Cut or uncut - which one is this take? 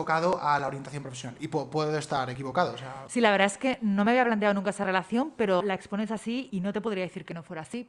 cut